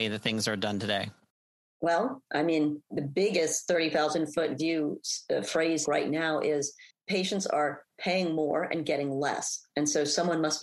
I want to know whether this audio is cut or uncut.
cut